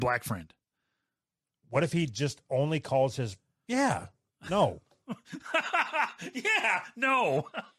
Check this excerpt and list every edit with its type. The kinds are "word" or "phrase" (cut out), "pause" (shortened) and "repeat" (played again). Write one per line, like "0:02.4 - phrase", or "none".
none